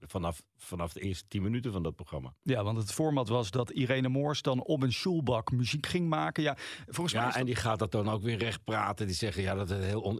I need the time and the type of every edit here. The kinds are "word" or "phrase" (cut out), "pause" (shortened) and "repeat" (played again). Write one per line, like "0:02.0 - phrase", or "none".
none